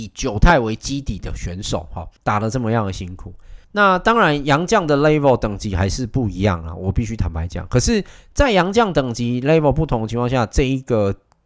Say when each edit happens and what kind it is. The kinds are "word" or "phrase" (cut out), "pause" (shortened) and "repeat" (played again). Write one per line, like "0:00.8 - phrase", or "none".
0:02.2 - pause
0:03.6 - pause